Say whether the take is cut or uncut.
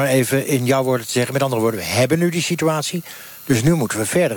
uncut